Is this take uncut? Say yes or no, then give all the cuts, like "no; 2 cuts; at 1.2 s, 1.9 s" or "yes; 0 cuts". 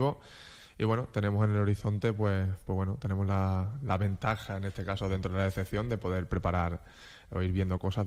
yes; 0 cuts